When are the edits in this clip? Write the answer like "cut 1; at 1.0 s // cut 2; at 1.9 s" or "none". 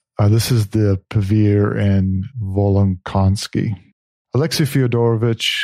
cut 1; at 2.3 s